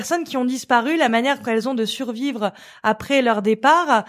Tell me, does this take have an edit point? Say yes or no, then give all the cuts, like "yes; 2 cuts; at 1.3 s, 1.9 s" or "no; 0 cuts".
no; 0 cuts